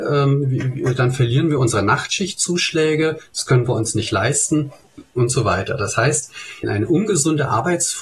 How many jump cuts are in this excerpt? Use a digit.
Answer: 1